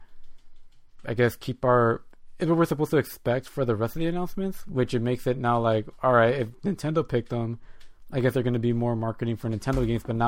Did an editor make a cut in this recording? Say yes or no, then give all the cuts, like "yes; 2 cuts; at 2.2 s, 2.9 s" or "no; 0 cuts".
no; 0 cuts